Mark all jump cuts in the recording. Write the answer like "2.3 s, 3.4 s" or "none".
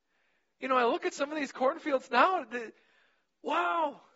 none